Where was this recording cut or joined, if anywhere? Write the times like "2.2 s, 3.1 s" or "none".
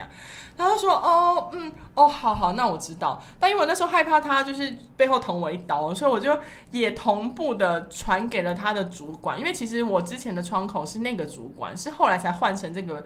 none

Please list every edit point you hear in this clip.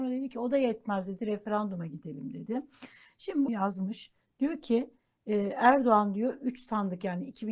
3.5 s

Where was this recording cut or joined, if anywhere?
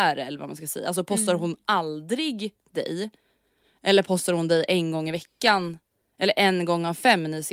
none

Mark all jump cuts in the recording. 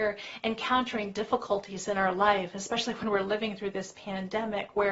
none

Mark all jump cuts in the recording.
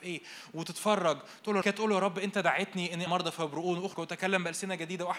1.6 s, 3.1 s, 3.9 s

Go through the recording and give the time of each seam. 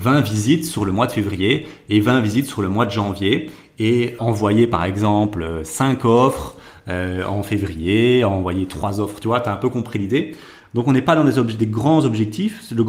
4.2 s

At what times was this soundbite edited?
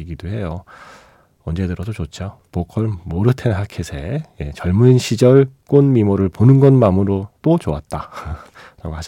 2.5 s, 5.6 s, 7.4 s

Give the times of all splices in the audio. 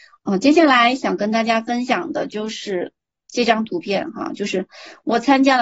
none

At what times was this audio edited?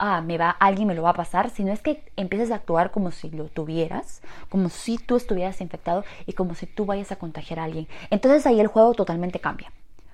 none

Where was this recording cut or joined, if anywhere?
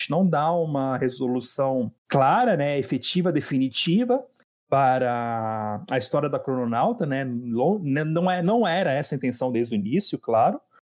2.0 s

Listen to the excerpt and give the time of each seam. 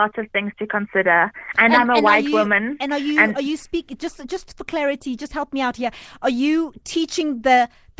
none

